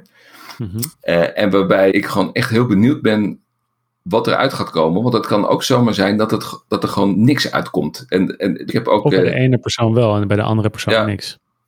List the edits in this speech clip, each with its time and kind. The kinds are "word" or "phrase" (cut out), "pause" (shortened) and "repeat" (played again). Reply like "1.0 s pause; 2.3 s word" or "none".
0.9 s pause; 1.9 s word; 8.7 s word